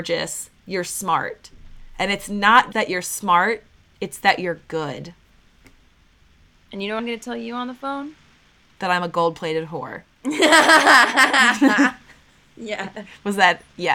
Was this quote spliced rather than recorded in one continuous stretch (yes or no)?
yes